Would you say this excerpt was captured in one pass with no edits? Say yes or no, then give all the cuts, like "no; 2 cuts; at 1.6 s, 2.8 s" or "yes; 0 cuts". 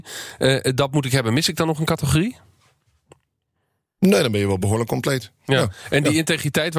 yes; 0 cuts